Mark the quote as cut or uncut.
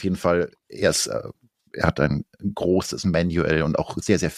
uncut